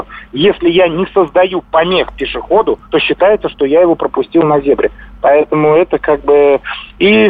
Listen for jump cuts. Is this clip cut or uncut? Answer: cut